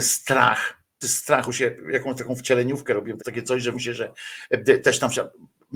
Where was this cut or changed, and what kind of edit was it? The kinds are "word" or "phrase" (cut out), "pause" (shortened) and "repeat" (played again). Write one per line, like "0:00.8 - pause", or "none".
0:01.0 - word
0:01.5 - word
0:03.2 - word
0:03.7 - word